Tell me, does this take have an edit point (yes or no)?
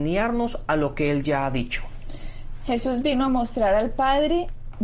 no